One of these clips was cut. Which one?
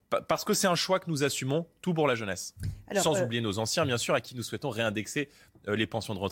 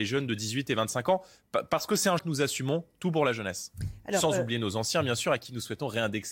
second; 1 cut; at 2.2 s

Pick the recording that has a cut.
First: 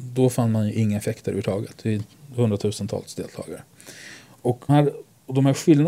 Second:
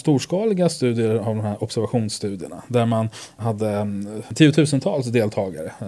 first; 1 cut; at 4.7 s

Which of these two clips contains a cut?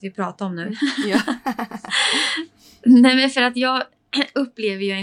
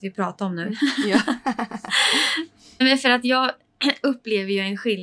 second; 1 cut; at 2.8 s

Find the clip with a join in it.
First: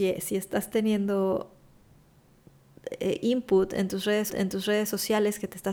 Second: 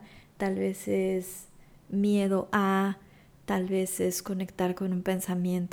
first; 1 cut; at 4.3 s

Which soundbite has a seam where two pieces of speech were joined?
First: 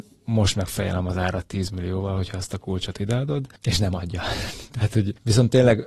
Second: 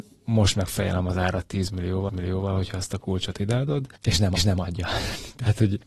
second; 2 cuts; at 2.1 s, 4.4 s

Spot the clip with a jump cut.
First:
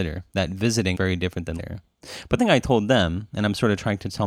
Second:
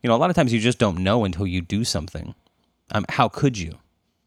first; 3 cuts; at 0.9 s, 1.6 s, 2.4 s

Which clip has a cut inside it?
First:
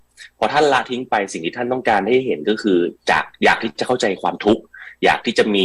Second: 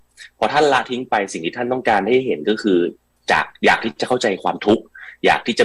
first; 1 cut; at 3.0 s

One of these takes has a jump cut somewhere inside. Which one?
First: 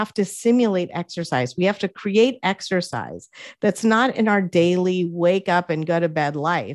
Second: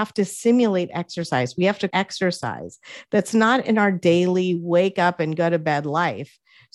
second; 1 cut; at 1.9 s

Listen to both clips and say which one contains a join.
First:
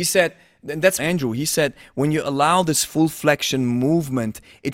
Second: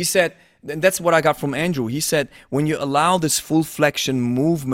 first; 1 cut; at 1.0 s

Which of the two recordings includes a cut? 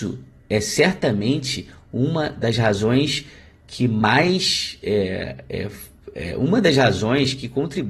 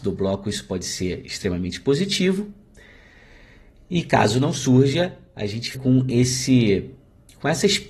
second; 1 cut; at 5.7 s

